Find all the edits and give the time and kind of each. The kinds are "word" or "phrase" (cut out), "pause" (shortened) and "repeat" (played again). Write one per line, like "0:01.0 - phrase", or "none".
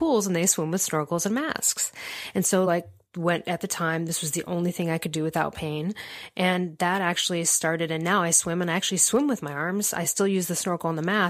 none